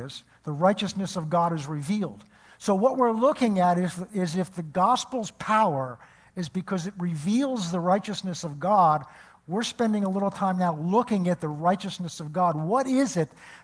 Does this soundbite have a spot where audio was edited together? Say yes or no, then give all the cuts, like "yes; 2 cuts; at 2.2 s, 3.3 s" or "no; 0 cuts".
no; 0 cuts